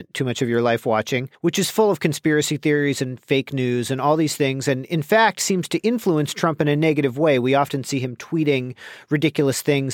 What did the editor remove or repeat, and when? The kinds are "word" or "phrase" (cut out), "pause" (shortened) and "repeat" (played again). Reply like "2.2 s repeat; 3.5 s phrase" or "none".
1.3 s pause